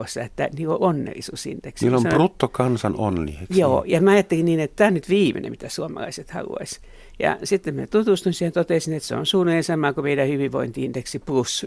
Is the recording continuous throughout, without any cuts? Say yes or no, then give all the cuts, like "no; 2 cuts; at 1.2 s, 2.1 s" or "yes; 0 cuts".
yes; 0 cuts